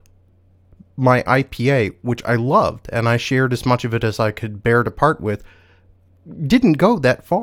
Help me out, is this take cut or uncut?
uncut